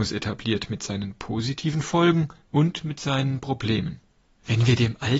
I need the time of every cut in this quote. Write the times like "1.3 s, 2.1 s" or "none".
2.4 s, 4.3 s